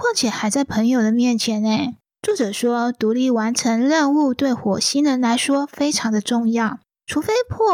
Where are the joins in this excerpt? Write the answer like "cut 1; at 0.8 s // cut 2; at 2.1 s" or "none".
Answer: none